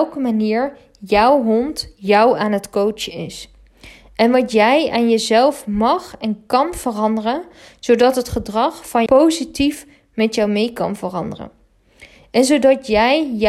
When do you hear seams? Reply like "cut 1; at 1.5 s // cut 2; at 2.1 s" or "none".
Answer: cut 1; at 9.1 s

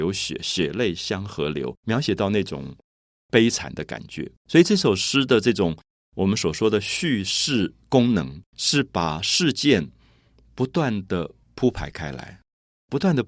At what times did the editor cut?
cut 1; at 1.8 s // cut 2; at 4.4 s // cut 3; at 7.8 s // cut 4; at 8.5 s // cut 5; at 11.4 s

